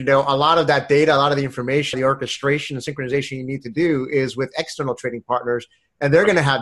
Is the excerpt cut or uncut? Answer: cut